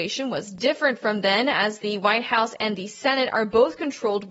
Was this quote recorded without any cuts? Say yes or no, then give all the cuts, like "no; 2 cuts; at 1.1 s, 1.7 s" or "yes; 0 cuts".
yes; 0 cuts